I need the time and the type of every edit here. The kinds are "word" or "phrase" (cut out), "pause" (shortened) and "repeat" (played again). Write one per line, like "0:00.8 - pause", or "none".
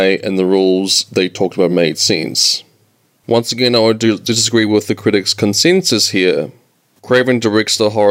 none